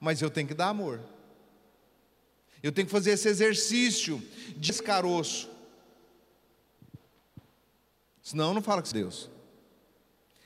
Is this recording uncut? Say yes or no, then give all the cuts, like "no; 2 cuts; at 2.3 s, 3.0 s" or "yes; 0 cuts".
no; 2 cuts; at 4.7 s, 8.9 s